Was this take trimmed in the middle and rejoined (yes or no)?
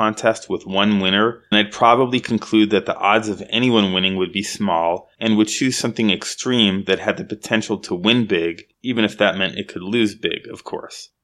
yes